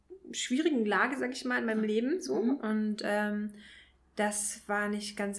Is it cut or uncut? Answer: uncut